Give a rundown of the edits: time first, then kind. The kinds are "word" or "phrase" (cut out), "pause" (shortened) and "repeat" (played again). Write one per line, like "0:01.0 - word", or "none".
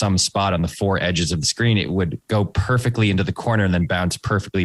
none

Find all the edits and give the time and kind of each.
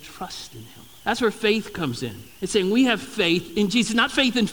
0:01.0 - pause
0:02.3 - pause

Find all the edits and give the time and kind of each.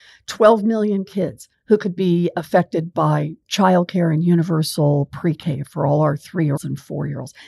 0:01.5 - pause
0:06.6 - word

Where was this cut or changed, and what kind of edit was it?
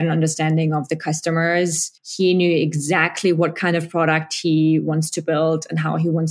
0:02.0 - pause

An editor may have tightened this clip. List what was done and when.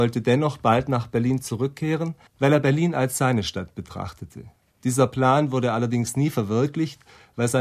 0:02.3 - pause

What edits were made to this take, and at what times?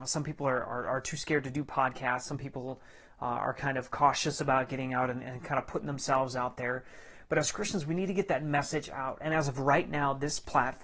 none

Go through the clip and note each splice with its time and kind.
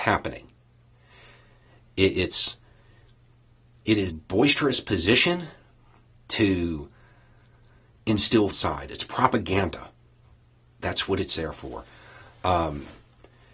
0:04.1 - word
0:08.5 - phrase

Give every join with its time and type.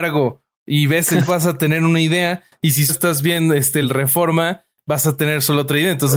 0:01.3 - word
0:02.9 - word
0:03.8 - word

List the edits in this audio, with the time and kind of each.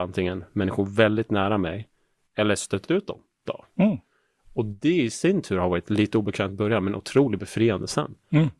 0:02.9 - word
0:03.5 - word

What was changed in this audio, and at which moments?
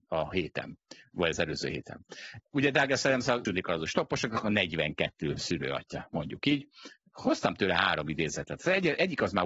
0:03.5 - word

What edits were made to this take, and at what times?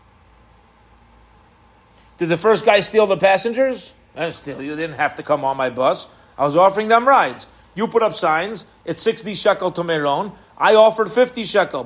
none

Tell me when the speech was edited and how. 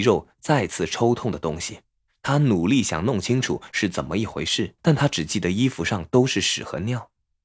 0:02.1 - pause
0:04.8 - pause

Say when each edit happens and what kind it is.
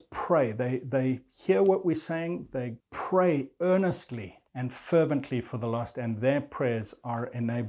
0:02.8 - pause
0:04.5 - pause

